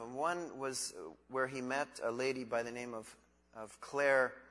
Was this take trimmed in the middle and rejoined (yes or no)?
no